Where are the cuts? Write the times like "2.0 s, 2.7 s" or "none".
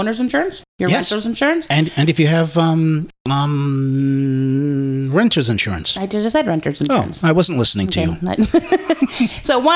none